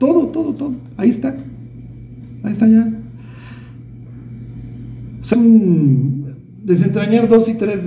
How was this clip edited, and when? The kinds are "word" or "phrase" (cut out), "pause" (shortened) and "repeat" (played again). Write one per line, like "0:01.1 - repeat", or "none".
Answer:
0:05.3 - word